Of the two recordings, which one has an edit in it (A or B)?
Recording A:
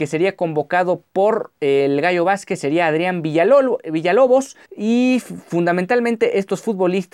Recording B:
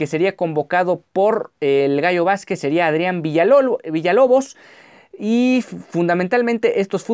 A